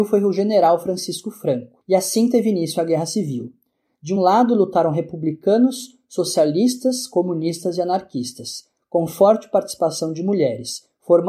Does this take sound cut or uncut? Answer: uncut